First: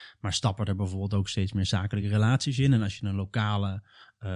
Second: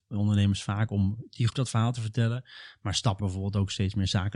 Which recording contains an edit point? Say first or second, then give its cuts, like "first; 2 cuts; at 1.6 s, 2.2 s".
second; 3 cuts; at 1.5 s, 1.9 s, 3.2 s